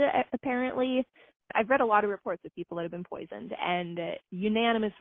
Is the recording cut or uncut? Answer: uncut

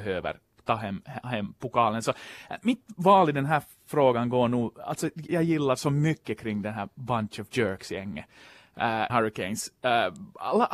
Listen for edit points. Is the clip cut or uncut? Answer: cut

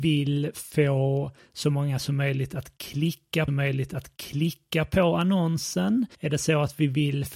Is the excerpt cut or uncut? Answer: cut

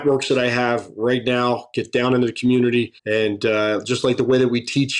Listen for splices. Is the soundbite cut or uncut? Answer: cut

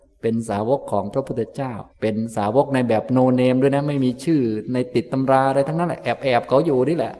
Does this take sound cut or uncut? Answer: cut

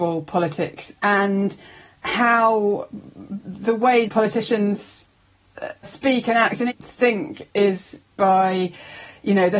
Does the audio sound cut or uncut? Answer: cut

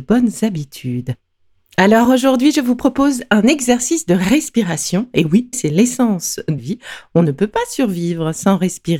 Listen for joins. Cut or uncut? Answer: cut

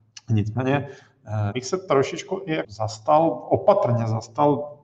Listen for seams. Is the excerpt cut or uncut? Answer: cut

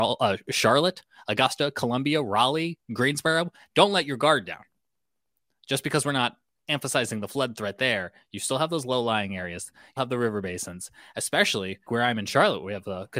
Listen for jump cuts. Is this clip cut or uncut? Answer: cut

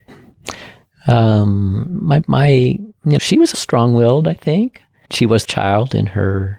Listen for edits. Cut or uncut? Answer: cut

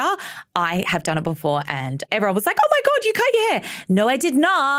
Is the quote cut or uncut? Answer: uncut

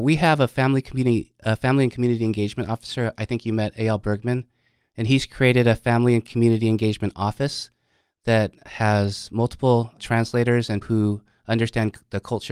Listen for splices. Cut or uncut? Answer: cut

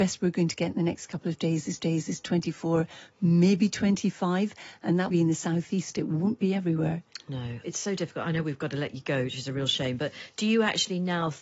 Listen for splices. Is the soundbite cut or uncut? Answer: cut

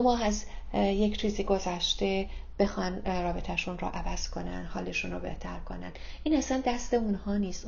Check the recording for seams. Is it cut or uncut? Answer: uncut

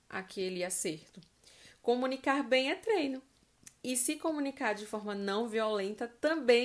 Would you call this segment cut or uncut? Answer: uncut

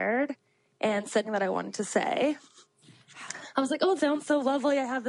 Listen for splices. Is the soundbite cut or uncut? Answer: cut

